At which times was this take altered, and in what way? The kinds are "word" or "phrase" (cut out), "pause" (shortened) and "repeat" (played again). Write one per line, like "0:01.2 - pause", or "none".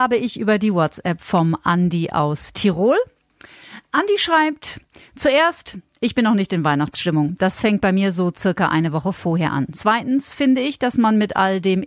none